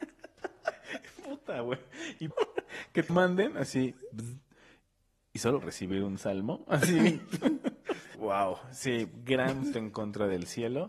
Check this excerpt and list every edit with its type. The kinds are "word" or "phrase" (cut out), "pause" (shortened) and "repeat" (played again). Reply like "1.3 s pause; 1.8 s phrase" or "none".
2.3 s word; 3.1 s word; 5.6 s word; 8.1 s word; 9.7 s word